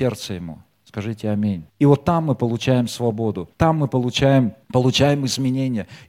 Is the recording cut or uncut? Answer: cut